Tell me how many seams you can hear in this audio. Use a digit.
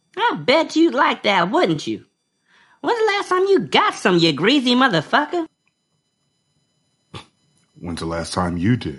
0